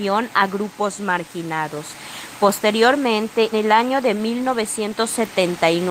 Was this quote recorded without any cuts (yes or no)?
no